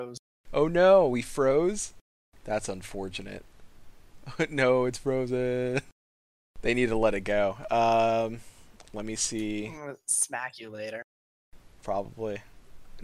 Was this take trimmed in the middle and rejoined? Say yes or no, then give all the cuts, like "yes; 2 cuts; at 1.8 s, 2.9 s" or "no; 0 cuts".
no; 0 cuts